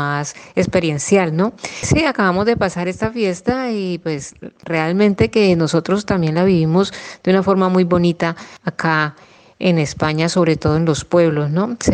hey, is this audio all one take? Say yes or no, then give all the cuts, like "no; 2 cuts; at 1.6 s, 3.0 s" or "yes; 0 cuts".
yes; 0 cuts